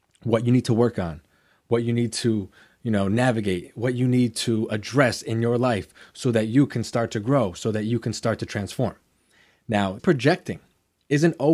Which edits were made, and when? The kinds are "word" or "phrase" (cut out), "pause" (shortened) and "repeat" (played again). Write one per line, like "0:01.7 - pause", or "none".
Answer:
0:10.0 - word